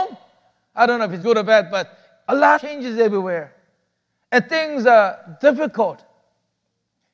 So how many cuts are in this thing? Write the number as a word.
two